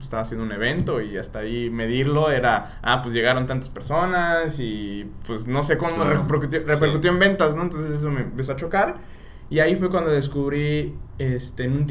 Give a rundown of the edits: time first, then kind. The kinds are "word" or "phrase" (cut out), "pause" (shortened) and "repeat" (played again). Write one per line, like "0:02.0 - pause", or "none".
none